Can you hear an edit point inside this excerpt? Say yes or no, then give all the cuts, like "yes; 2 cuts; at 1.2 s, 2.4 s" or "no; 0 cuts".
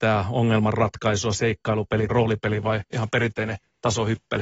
yes; 2 cuts; at 1.3 s, 2.1 s